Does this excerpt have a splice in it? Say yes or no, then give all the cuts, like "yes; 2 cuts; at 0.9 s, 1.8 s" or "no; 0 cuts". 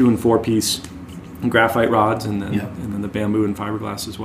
no; 0 cuts